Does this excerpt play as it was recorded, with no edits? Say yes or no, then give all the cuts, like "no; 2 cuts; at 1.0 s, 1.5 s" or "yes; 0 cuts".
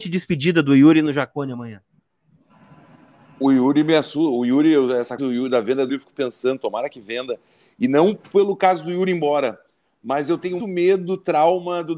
no; 3 cuts; at 5.2 s, 5.9 s, 10.6 s